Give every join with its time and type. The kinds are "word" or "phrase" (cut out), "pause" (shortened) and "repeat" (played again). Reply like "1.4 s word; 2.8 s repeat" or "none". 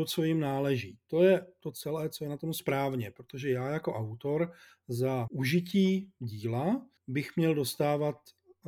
5.3 s word; 6.2 s word; 7.0 s pause